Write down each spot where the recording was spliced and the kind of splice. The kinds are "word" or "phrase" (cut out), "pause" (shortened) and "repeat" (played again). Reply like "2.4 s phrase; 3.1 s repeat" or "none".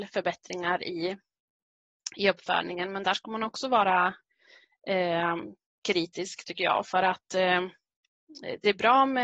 none